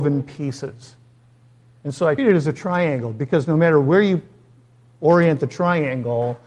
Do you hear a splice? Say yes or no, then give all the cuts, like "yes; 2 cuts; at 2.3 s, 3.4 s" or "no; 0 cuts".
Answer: yes; 1 cut; at 2.2 s